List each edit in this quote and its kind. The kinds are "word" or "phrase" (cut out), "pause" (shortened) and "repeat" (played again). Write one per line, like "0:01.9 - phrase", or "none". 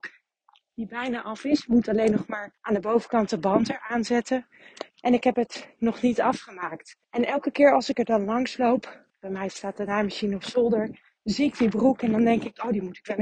0:02.6 - pause
0:04.9 - pause
0:07.0 - pause
0:09.1 - pause
0:11.2 - pause